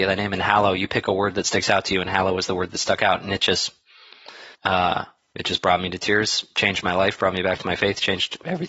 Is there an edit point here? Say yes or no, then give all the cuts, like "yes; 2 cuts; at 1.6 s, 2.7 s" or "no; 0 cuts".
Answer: yes; 1 cut; at 4.5 s